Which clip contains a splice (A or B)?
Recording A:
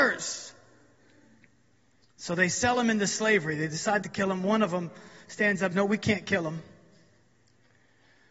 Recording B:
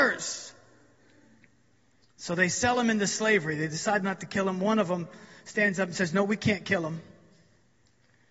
A